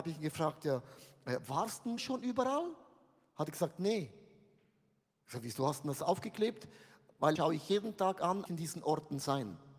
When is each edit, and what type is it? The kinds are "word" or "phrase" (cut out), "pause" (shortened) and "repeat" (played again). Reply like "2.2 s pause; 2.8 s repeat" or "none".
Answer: 2.0 s word; 7.4 s word; 8.5 s phrase